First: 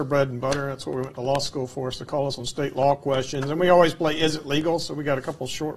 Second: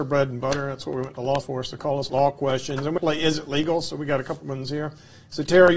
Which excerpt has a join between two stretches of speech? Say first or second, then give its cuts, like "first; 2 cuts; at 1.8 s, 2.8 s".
second; 4 cuts; at 1.4 s, 2.1 s, 3.0 s, 4.4 s